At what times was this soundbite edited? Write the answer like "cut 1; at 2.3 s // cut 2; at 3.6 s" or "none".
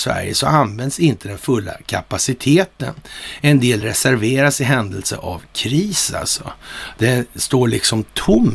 none